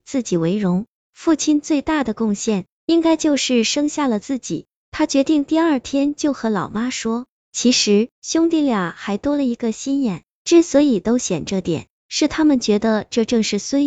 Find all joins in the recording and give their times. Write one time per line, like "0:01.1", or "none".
0:08.1